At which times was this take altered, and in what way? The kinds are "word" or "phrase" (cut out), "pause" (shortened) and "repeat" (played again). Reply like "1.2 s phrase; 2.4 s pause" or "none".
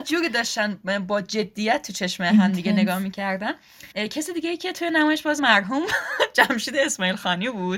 3.9 s pause; 5.4 s word